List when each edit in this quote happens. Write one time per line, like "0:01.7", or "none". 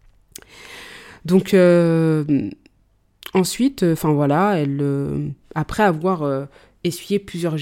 none